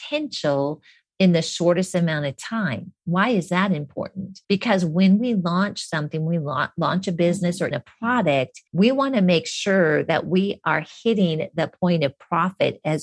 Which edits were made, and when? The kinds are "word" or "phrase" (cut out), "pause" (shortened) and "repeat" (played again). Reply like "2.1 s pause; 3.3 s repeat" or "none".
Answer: 4.4 s pause; 7.7 s word; 8.7 s pause